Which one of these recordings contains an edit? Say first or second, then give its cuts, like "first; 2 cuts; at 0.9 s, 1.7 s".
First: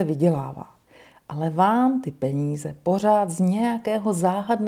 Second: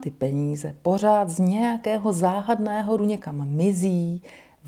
second; 1 cut; at 3.0 s